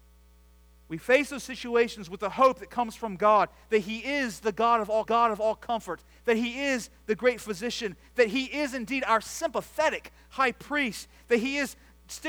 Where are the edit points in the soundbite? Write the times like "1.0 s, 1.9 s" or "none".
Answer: 5.0 s

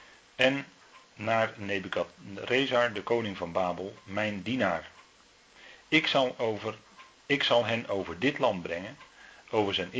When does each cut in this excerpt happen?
none

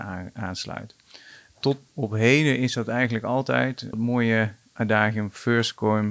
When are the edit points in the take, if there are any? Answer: 1.9 s, 3.9 s

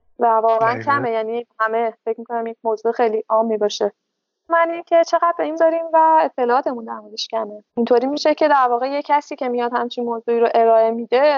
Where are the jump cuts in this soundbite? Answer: 1.5 s, 4.5 s, 5.6 s, 7.7 s

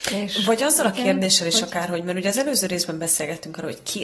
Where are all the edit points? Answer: none

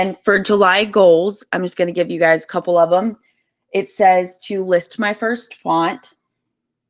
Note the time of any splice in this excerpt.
none

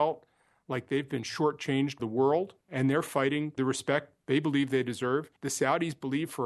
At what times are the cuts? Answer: 2.0 s, 3.6 s, 5.4 s

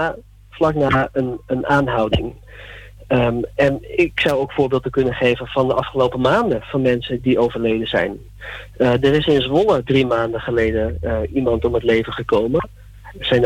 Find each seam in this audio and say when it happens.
7.2 s

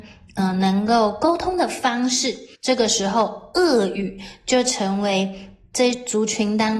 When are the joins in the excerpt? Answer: 2.6 s

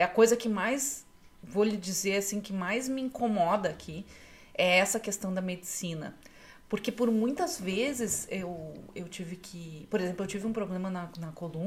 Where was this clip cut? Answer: none

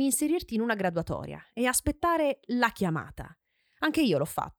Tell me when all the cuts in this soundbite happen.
none

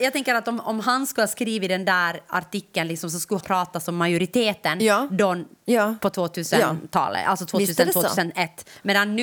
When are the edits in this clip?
3.4 s

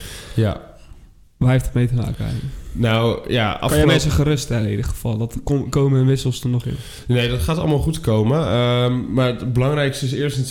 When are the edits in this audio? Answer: none

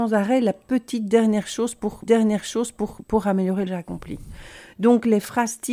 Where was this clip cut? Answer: 2.1 s, 3.7 s

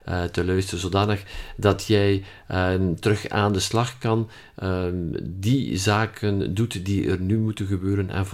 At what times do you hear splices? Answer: none

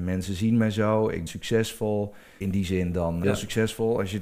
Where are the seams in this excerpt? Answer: 1.3 s, 3.2 s

